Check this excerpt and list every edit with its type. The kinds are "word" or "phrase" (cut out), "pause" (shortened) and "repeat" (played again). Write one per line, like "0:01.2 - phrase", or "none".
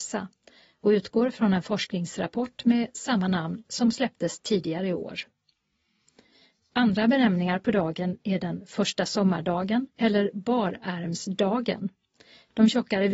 0:09.9 - pause